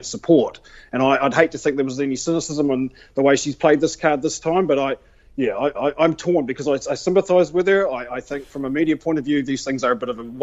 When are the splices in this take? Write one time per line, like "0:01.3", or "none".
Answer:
0:05.7